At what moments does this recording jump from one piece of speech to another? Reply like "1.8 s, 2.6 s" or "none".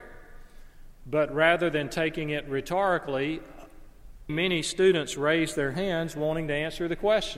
4.3 s